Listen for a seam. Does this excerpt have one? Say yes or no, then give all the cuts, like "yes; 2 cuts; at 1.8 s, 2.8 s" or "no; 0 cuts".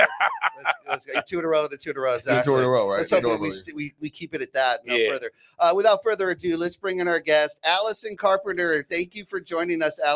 no; 0 cuts